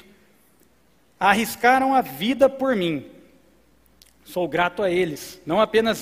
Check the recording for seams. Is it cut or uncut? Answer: uncut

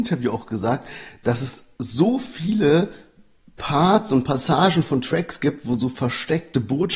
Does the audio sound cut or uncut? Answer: uncut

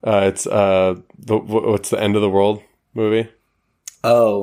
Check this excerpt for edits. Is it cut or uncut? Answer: cut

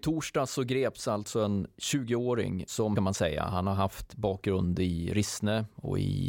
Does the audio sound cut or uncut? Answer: cut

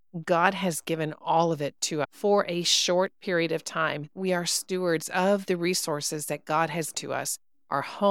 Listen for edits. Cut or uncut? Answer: cut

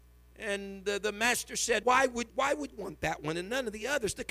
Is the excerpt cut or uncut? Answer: cut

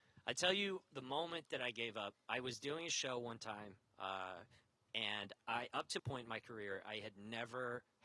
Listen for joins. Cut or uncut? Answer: cut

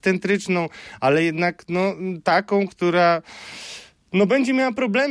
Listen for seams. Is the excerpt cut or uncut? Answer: uncut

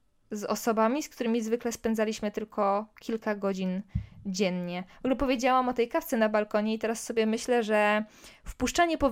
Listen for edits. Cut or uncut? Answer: uncut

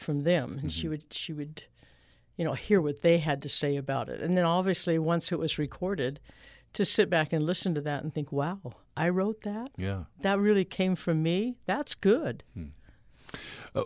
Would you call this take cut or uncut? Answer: uncut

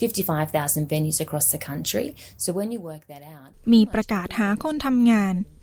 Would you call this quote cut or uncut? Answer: uncut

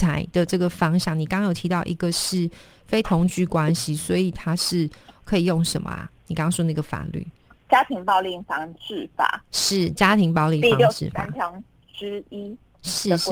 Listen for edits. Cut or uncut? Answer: uncut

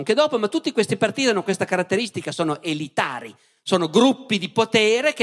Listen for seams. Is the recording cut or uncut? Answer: uncut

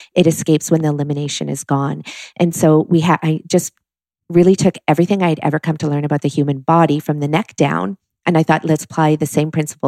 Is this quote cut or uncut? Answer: uncut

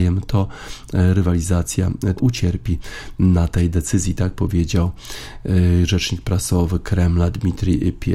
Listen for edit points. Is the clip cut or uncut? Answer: cut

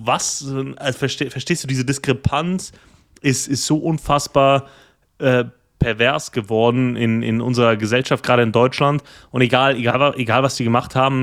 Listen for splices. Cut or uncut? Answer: uncut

